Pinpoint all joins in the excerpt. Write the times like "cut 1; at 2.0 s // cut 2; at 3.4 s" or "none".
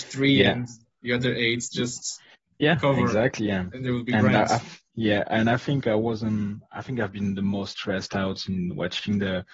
cut 1; at 2.3 s // cut 2; at 4.8 s